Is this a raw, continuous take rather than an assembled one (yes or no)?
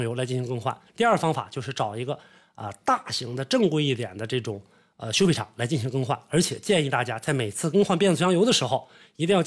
yes